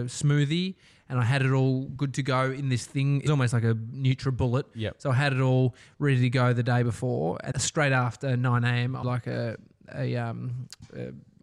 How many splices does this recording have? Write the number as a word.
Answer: three